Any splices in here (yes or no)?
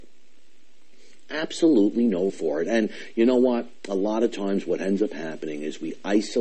yes